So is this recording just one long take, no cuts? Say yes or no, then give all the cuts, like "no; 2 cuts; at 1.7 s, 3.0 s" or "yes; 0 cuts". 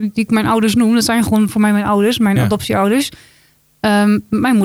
yes; 0 cuts